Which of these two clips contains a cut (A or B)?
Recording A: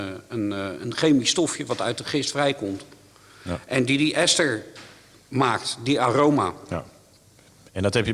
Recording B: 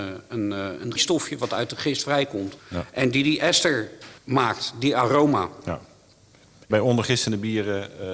B